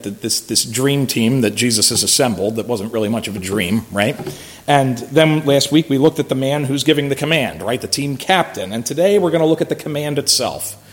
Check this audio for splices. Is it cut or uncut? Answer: uncut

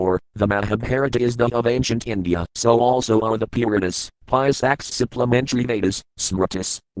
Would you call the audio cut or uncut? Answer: cut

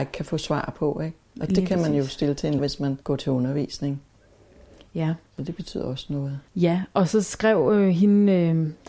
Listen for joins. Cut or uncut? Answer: cut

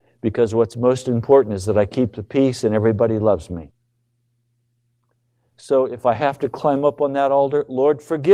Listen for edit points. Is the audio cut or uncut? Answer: uncut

